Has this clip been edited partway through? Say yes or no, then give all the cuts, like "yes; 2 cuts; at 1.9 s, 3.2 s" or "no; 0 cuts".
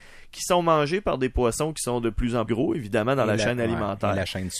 yes; 1 cut; at 2.5 s